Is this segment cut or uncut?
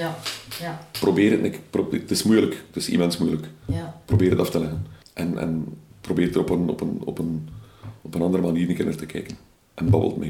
uncut